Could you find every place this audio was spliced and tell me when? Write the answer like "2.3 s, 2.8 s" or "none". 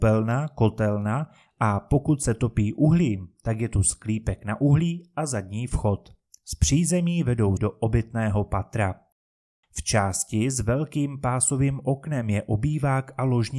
7.6 s

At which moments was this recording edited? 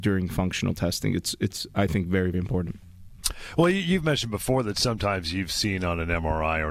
2.3 s

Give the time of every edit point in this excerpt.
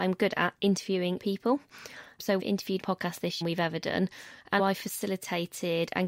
1.2 s, 2.4 s, 2.8 s, 3.4 s, 4.6 s

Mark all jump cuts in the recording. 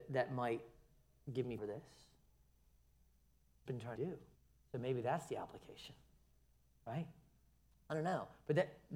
1.6 s, 3.7 s, 4.0 s, 4.4 s

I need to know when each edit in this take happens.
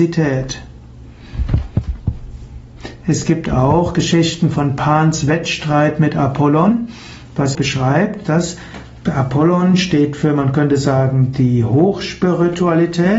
7.5 s

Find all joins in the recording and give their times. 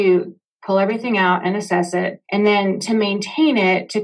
2.2 s

